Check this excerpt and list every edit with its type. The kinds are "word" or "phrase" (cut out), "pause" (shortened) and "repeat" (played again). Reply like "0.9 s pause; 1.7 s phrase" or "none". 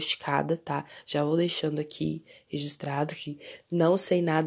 none